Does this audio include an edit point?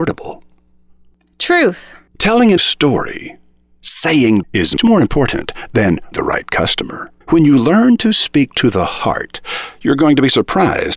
yes; 6 cuts; at 2.1 s, 2.6 s, 4.4 s, 4.8 s, 6.1 s, 7.2 s

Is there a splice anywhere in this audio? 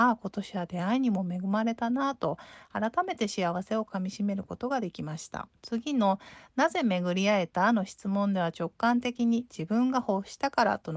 yes; 1 cut; at 5.6 s

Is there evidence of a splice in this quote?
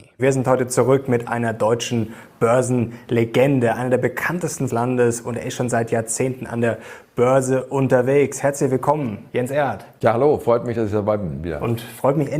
yes; 2 cuts; at 4.7 s, 9.3 s

